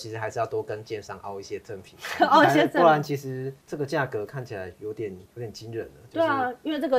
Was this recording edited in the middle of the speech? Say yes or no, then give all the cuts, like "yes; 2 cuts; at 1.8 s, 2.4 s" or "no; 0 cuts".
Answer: yes; 2 cuts; at 3.6 s, 5.3 s